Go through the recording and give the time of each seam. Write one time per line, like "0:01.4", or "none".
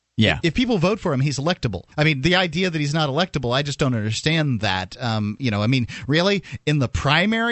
0:01.9